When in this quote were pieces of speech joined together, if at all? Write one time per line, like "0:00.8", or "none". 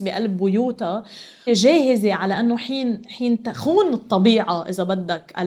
0:01.5